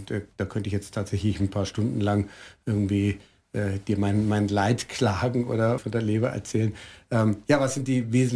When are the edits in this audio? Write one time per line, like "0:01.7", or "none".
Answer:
0:05.8